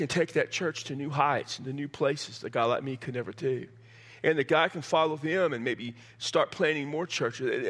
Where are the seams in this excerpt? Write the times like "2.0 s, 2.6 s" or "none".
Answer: none